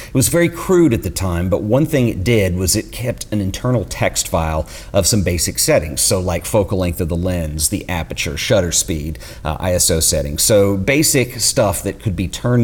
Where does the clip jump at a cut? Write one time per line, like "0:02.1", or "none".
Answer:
none